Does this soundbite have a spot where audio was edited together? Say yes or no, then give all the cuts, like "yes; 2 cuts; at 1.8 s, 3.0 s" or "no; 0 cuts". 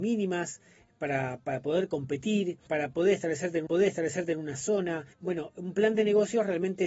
yes; 3 cuts; at 2.7 s, 3.7 s, 5.1 s